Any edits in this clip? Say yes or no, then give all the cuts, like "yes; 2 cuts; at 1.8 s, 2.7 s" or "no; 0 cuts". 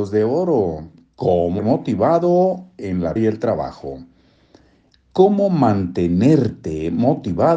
yes; 2 cuts; at 1.6 s, 3.2 s